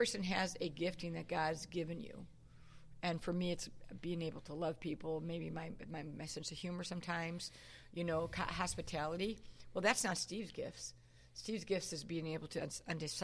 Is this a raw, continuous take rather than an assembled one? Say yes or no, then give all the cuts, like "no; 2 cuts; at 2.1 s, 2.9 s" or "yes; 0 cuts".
yes; 0 cuts